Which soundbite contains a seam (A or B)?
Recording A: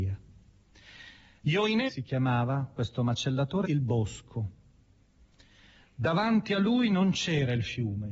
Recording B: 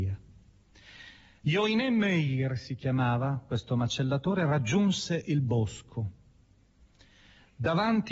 A